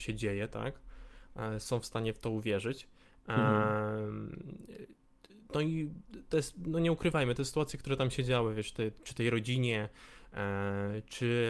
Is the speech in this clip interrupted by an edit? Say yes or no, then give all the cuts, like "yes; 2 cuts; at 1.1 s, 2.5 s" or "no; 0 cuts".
no; 0 cuts